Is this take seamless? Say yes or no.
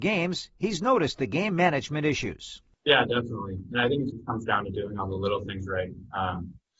yes